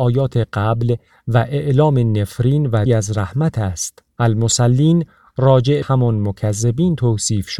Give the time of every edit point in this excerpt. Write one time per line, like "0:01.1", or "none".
0:02.9
0:04.1
0:05.8

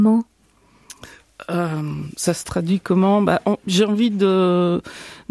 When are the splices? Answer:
none

